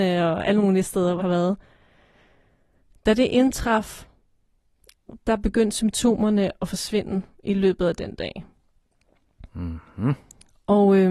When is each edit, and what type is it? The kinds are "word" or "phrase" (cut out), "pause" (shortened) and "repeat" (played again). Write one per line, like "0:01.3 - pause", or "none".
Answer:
0:01.2 - word